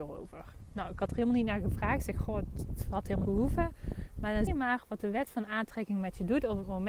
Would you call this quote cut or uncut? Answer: cut